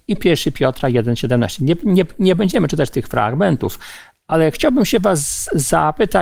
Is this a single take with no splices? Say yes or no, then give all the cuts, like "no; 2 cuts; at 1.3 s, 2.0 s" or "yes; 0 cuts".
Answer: yes; 0 cuts